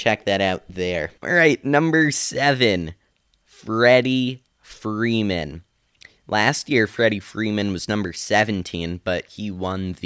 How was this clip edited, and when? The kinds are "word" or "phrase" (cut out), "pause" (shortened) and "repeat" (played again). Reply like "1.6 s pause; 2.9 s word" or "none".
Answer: none

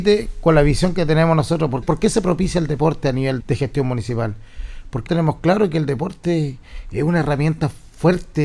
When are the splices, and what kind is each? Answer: 1.8 s word; 3.4 s word; 5.1 s word

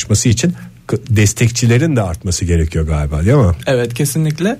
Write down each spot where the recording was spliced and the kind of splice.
none

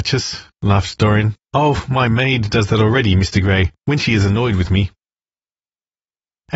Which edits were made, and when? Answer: 1.4 s pause; 3.8 s pause

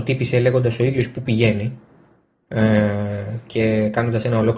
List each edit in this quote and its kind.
none

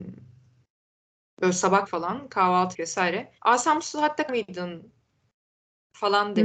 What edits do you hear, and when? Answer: 1.9 s word; 2.7 s word; 3.4 s pause; 4.3 s word

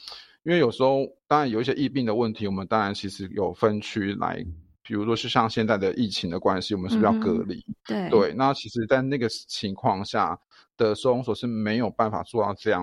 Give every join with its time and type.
none

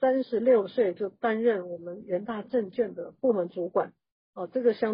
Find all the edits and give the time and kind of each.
none

